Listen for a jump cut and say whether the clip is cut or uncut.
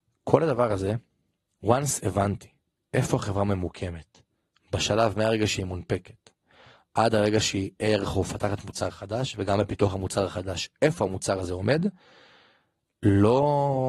uncut